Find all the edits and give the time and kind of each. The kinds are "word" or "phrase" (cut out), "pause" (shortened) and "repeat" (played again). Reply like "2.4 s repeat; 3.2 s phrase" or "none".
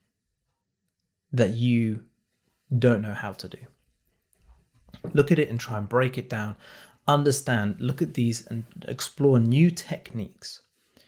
none